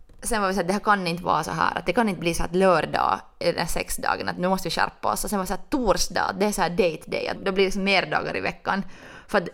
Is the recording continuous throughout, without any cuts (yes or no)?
no